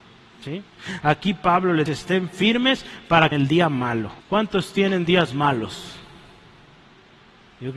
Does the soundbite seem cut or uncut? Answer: cut